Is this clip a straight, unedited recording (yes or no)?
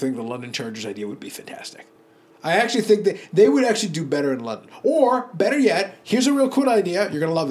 yes